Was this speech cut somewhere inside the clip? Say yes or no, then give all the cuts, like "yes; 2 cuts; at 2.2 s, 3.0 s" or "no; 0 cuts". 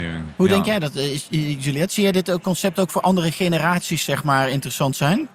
no; 0 cuts